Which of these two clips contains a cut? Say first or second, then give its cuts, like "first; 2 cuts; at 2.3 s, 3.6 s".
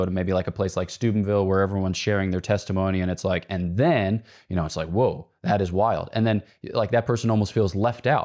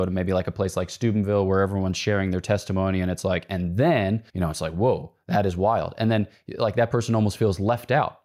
second; 1 cut; at 4.3 s